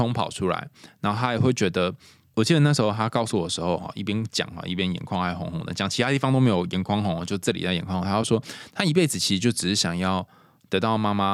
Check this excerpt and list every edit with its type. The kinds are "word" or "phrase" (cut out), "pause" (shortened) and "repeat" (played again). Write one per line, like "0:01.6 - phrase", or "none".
none

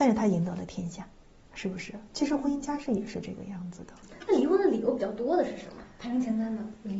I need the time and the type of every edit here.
0:01.3 - pause

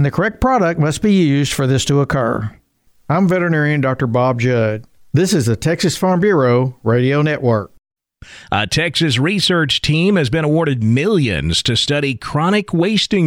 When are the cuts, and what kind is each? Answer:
none

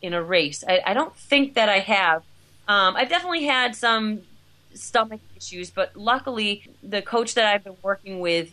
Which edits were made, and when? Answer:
none

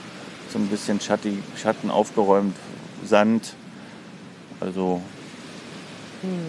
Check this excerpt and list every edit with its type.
none

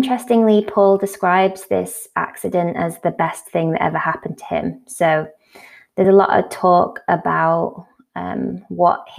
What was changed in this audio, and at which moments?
none

